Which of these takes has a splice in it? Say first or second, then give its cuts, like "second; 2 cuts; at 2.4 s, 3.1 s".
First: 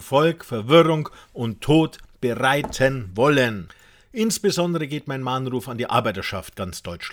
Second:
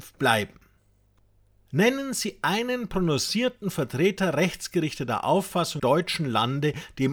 second; 1 cut; at 5.8 s